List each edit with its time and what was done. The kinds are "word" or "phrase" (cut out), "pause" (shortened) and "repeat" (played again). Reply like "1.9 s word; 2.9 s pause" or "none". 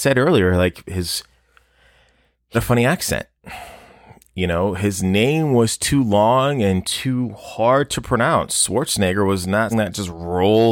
2.5 s word; 9.7 s word